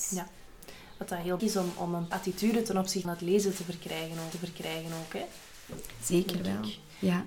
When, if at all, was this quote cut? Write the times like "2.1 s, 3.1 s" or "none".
1.4 s, 2.1 s, 3.0 s, 4.3 s